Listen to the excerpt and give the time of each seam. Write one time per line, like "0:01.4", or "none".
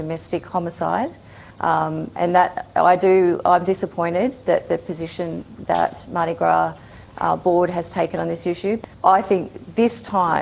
0:01.5
0:08.9